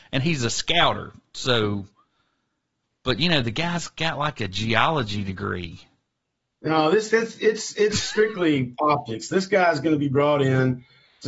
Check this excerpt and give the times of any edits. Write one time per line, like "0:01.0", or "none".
none